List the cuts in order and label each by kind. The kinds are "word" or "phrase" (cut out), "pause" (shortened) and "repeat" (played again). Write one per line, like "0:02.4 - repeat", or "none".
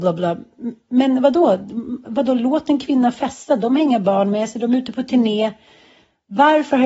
none